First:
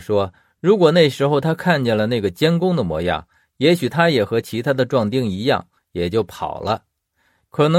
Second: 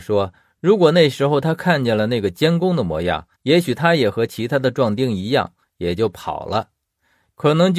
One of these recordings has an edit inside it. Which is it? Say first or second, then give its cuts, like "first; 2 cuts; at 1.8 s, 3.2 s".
second; 1 cut; at 3.3 s